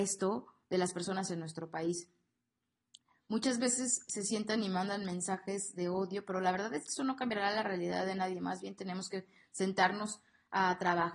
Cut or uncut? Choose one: uncut